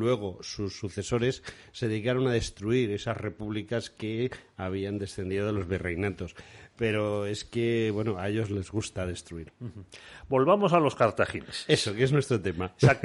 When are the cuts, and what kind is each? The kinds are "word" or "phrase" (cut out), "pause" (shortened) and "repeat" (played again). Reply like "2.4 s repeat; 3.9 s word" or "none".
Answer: none